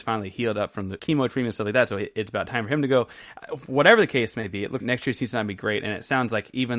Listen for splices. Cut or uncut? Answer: cut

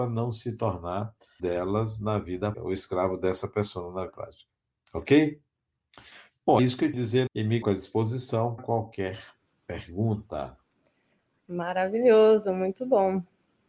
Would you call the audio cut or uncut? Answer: cut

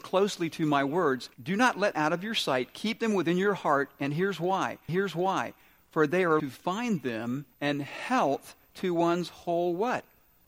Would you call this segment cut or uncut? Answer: cut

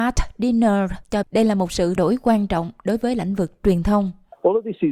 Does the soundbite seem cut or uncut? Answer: cut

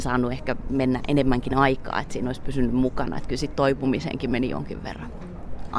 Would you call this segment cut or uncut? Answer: uncut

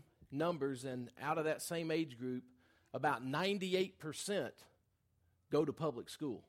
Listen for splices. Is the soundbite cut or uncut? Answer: uncut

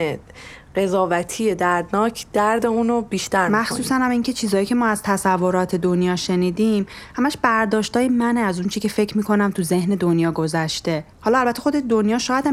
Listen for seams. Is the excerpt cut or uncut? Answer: cut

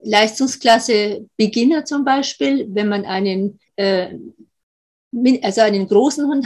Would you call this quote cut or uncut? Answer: cut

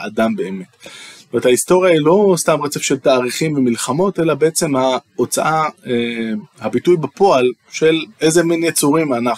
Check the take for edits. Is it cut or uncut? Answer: cut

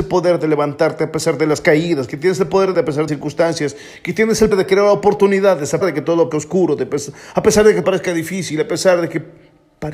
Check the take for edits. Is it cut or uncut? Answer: cut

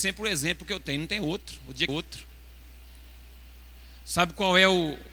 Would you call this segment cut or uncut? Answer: cut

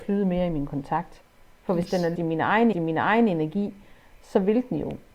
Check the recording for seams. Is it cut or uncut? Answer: cut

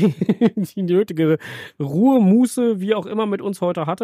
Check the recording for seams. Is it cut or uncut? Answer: uncut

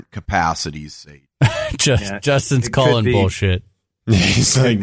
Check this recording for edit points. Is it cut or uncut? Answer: uncut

